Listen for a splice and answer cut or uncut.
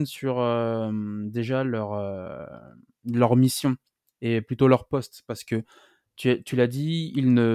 uncut